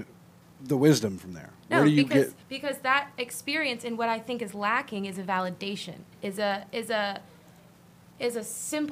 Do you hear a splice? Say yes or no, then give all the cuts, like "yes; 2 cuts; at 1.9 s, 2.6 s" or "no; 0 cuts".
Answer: yes; 2 cuts; at 2.4 s, 6.1 s